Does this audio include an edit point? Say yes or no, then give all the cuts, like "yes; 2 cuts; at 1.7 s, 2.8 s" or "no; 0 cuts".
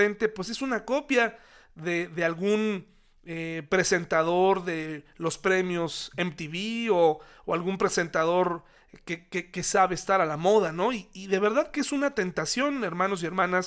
no; 0 cuts